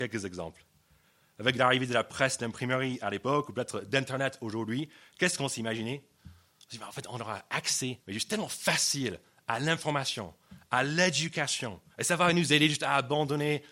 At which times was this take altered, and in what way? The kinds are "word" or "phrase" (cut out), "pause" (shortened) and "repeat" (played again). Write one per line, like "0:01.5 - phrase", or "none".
0:08.0 - pause
0:11.9 - pause